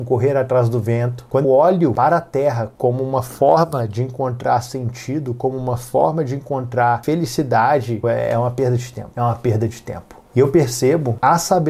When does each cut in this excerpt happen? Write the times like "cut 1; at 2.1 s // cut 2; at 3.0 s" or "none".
cut 1; at 1.4 s // cut 2; at 8.0 s